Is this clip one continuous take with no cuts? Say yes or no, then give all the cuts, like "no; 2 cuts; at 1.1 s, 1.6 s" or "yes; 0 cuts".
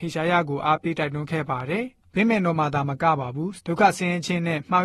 no; 1 cut; at 2.0 s